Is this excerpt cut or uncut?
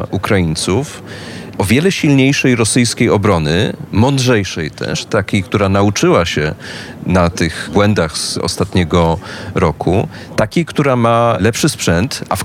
uncut